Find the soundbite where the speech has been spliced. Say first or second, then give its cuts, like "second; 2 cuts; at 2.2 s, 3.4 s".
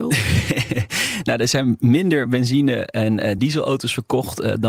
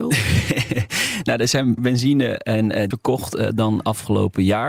second; 2 cuts; at 1.8 s, 2.9 s